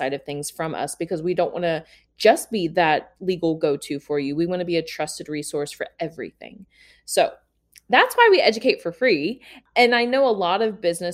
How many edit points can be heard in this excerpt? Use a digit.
0